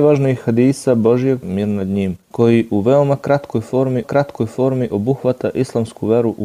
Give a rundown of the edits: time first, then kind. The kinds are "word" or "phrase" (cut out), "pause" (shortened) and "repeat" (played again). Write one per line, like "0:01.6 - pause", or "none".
0:01.4 - word
0:02.2 - pause
0:04.0 - repeat